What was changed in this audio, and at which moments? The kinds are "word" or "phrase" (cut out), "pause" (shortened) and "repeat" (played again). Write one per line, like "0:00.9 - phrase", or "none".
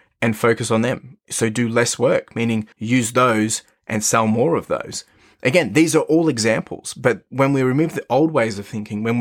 0:02.7 - pause